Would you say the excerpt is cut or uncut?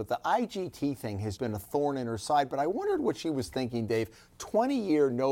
cut